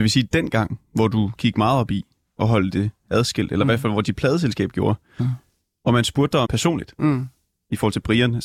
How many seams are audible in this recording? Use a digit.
1